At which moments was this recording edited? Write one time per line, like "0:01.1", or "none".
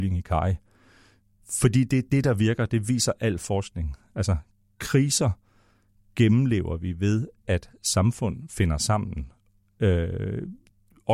none